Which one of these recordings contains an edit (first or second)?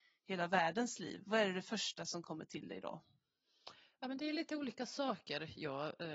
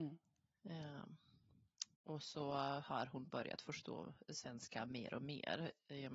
second